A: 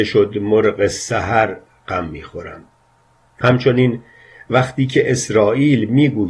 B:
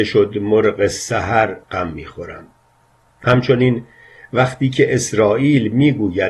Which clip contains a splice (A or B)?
B